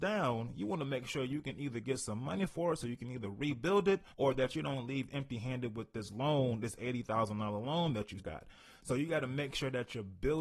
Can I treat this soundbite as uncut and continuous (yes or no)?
no